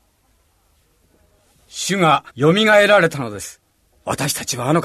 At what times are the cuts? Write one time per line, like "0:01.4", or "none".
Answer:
0:02.3
0:03.9